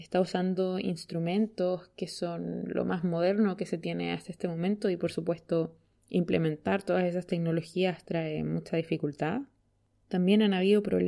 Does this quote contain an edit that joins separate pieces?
no; 0 cuts

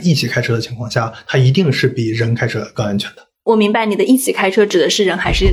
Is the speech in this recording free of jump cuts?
yes; 0 cuts

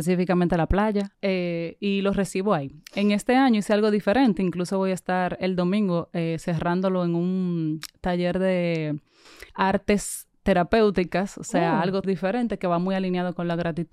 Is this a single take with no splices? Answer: no; 3 cuts; at 1.1 s, 9.5 s, 12.0 s

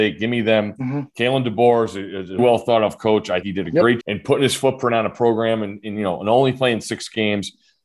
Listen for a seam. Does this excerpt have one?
yes; 3 cuts; at 2.4 s, 3.4 s, 4.0 s

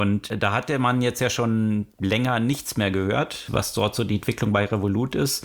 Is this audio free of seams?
yes; 0 cuts

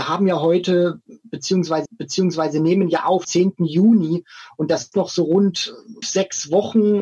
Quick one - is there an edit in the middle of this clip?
yes; 4 cuts; at 1.9 s, 3.2 s, 4.9 s, 6.0 s

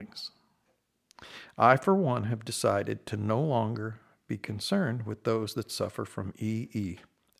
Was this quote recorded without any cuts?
yes; 0 cuts

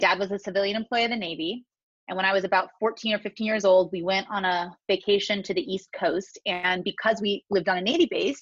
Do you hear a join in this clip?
no; 0 cuts

